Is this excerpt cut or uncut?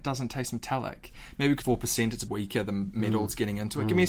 cut